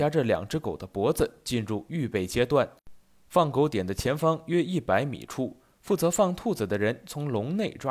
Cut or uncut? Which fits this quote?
uncut